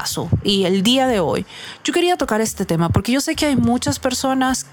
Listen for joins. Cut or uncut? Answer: uncut